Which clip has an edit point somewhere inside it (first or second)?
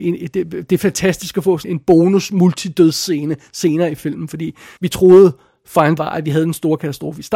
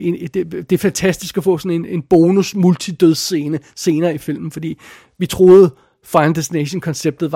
first